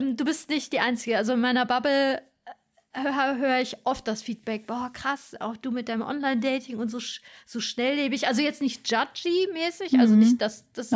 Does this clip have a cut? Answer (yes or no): no